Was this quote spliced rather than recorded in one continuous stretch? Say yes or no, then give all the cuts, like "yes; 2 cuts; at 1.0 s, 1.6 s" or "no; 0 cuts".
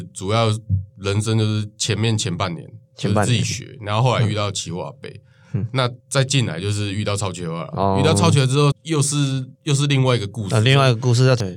yes; 4 cuts; at 2.8 s, 6.0 s, 8.7 s, 9.6 s